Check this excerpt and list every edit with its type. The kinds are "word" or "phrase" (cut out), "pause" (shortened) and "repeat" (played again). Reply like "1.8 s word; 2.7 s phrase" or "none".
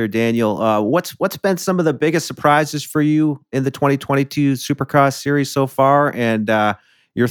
none